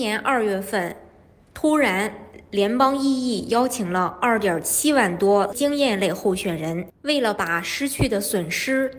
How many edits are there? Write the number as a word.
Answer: two